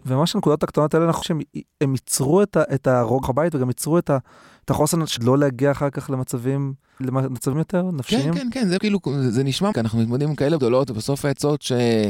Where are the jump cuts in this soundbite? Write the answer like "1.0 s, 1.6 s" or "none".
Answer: 1.2 s, 3.2 s, 5.2 s, 7.0 s, 7.5 s, 8.8 s, 9.7 s, 10.6 s